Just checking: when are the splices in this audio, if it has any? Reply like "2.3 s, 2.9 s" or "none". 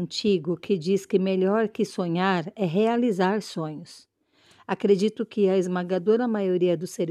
none